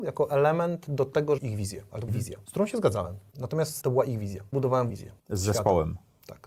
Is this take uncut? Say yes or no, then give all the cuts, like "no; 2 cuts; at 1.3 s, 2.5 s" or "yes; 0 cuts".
no; 5 cuts; at 1.4 s, 2.1 s, 3.8 s, 4.5 s, 4.9 s